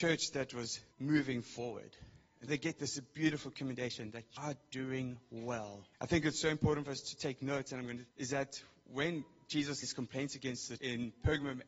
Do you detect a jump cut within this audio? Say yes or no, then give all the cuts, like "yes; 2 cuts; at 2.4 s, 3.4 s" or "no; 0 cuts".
yes; 7 cuts; at 0.9 s, 2.5 s, 4.4 s, 5.9 s, 8.1 s, 9.8 s, 10.8 s